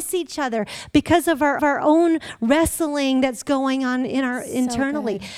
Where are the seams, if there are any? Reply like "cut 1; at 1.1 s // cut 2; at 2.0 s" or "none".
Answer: cut 1; at 1.6 s